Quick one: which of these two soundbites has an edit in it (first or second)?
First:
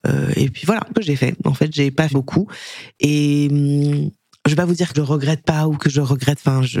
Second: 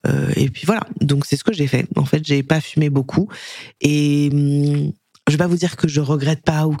first